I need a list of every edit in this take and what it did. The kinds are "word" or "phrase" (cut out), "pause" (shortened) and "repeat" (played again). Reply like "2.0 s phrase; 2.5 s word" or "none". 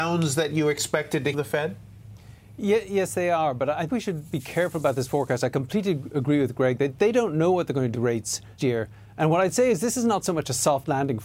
1.3 s phrase; 3.9 s word; 7.9 s word; 8.6 s word